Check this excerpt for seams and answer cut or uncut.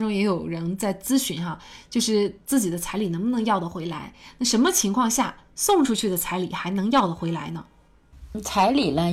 uncut